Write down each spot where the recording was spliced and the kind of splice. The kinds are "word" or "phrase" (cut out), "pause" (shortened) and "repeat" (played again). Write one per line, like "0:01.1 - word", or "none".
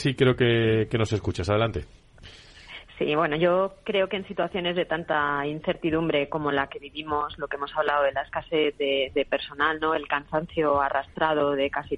none